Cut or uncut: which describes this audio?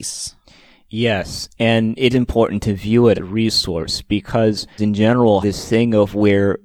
cut